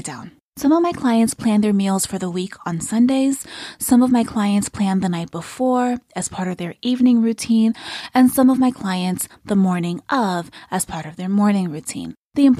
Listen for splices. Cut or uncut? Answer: uncut